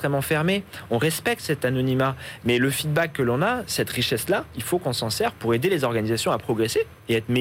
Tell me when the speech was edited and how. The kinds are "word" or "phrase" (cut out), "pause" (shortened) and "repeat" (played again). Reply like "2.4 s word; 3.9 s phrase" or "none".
none